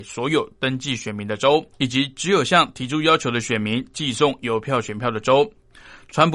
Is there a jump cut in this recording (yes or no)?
yes